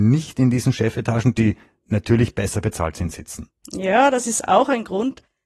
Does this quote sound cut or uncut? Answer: uncut